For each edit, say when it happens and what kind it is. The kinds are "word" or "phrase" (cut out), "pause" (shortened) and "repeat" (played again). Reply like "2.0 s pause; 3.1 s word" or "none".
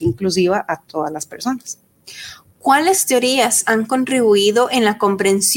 none

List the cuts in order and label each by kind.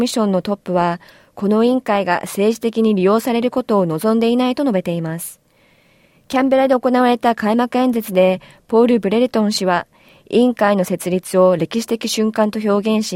none

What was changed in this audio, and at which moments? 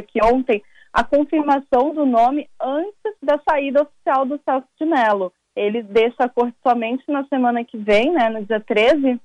3.2 s pause

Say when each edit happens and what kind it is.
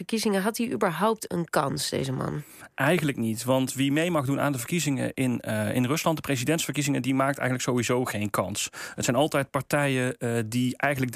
1.3 s word

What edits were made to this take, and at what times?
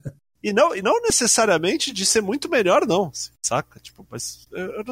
none

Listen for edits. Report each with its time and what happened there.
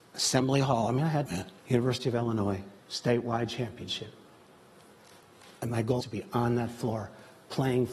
1.3 s phrase; 1.6 s pause; 2.8 s pause; 5.6 s phrase; 6.0 s word

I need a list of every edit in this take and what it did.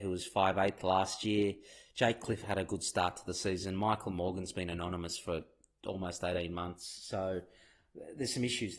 2.4 s phrase

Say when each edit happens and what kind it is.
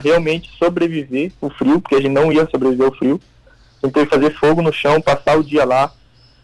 none

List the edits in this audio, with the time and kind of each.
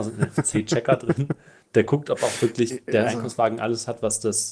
none

